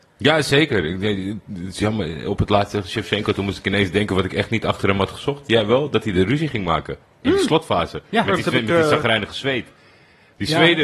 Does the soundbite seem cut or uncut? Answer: uncut